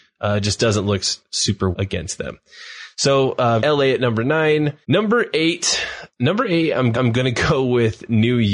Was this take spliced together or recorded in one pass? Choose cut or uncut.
cut